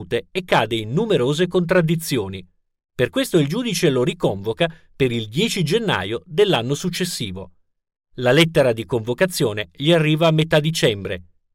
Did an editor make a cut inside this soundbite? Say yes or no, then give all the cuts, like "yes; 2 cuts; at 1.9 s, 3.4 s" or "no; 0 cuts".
no; 0 cuts